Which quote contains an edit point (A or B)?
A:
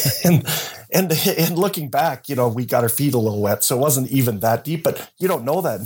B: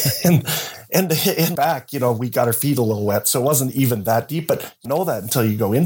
B